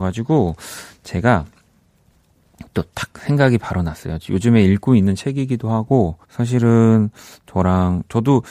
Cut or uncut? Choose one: cut